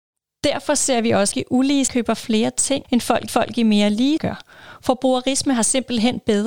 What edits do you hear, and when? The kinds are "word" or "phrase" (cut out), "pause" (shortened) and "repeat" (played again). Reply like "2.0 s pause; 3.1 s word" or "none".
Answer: 1.3 s phrase; 1.9 s word; 2.8 s phrase; 3.3 s repeat; 4.2 s word